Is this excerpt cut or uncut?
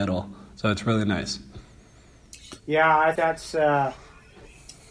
cut